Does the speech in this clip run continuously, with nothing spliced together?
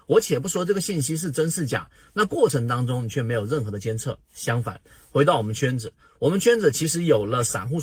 yes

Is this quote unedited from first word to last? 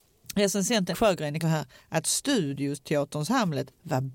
no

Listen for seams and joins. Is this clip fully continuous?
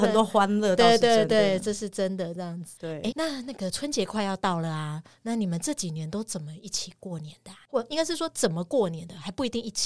no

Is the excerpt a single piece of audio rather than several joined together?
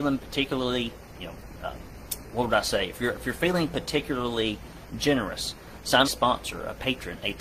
no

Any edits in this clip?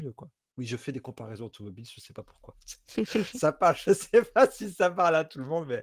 no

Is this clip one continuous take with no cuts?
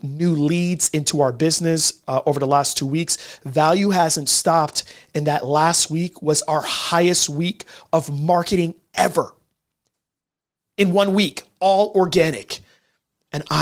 yes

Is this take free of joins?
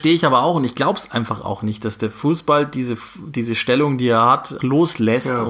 no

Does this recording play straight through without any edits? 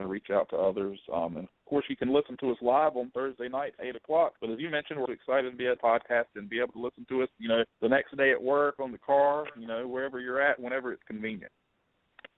no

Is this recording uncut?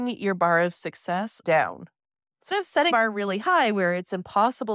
no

